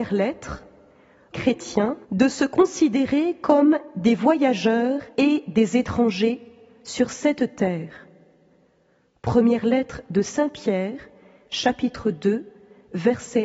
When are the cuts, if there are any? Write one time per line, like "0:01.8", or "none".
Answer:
0:01.3
0:02.0
0:05.1